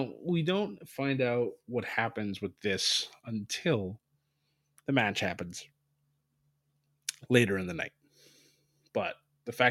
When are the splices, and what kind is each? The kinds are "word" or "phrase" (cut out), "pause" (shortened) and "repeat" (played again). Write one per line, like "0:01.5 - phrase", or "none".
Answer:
none